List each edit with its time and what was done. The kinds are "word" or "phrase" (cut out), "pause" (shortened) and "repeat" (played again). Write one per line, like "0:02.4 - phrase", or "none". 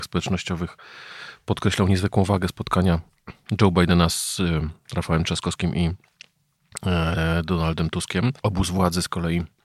none